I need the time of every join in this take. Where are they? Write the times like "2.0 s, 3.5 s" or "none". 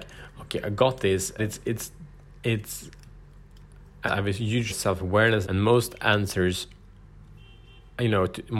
1.4 s, 4.1 s, 4.7 s, 5.4 s